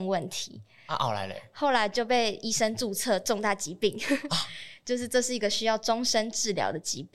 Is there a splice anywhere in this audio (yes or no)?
no